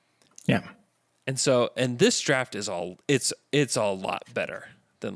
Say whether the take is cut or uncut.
uncut